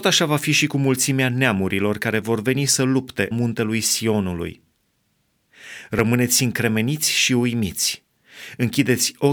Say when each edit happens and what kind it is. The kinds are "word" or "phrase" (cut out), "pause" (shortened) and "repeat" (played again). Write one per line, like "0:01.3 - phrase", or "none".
0:03.3 - word